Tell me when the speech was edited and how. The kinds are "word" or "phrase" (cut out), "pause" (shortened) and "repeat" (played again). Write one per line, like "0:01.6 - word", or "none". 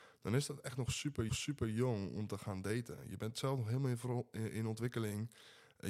0:01.3 - repeat